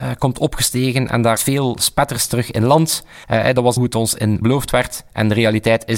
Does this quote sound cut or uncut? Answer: cut